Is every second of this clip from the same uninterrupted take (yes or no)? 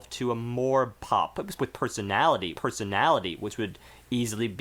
no